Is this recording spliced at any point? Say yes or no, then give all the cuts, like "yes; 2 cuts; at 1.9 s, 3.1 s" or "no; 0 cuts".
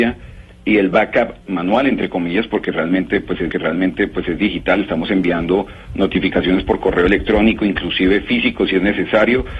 yes; 2 cuts; at 1.4 s, 3.5 s